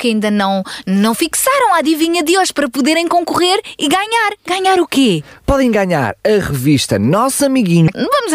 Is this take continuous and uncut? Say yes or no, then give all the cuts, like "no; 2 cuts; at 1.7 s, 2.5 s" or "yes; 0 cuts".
yes; 0 cuts